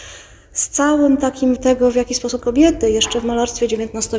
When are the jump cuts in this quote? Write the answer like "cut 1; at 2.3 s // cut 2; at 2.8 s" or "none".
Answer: cut 1; at 1.6 s // cut 2; at 2.4 s